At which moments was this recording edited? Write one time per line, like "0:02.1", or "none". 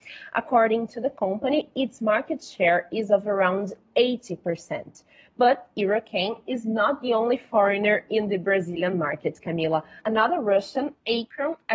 none